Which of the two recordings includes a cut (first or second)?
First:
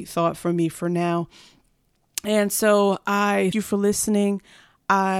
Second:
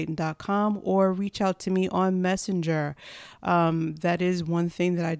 first